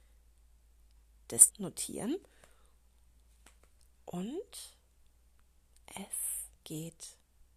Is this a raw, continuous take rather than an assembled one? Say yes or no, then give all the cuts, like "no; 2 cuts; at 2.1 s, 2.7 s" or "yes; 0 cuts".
no; 2 cuts; at 1.5 s, 6.6 s